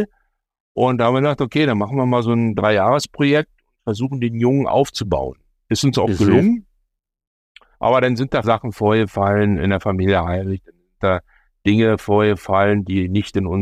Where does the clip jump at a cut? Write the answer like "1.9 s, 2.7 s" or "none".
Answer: 7.7 s, 8.4 s